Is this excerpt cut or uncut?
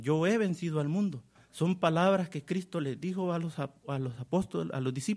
cut